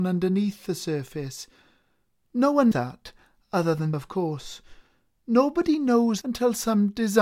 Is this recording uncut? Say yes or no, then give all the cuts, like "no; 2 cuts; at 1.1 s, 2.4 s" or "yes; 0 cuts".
no; 3 cuts; at 2.7 s, 3.9 s, 6.2 s